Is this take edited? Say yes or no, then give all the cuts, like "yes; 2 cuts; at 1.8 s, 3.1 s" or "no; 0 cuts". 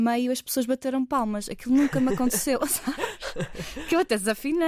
no; 0 cuts